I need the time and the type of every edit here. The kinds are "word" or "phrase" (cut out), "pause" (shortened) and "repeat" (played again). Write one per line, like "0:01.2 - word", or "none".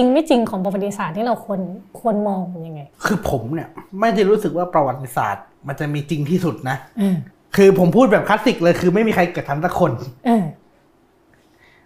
0:02.9 - pause
0:03.9 - pause
0:05.5 - pause
0:07.3 - pause